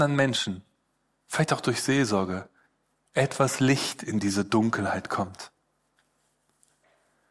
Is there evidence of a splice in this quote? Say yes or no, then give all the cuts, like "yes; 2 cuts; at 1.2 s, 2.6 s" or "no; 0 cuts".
no; 0 cuts